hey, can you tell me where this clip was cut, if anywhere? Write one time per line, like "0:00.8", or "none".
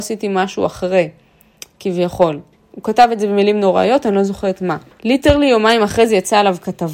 0:02.5
0:04.9

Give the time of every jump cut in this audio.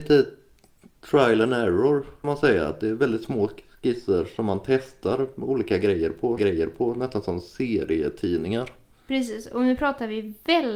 0:02.2
0:06.4

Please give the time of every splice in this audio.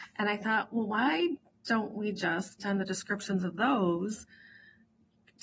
0:02.6

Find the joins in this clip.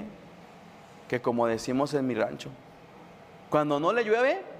none

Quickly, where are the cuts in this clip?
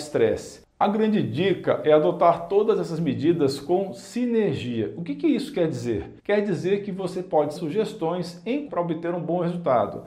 0:06.2
0:07.6
0:08.7

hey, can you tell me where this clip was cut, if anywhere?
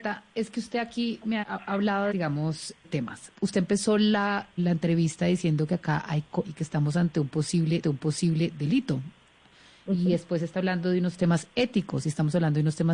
0:01.4
0:02.1
0:02.8
0:04.6
0:06.4
0:07.8

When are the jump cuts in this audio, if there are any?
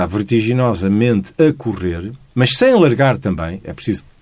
none

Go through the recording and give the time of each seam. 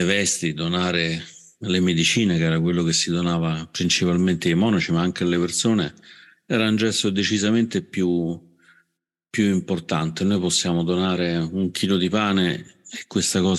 none

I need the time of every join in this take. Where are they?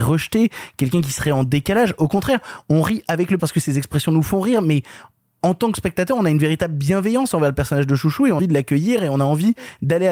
0:03.4
0:08.4

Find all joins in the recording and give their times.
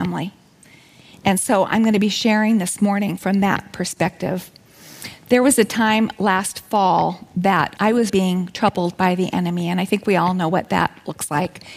0:07.8
0:08.1

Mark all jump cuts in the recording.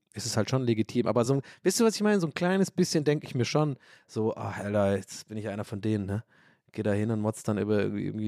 none

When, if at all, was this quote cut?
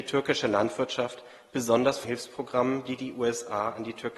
0:02.0

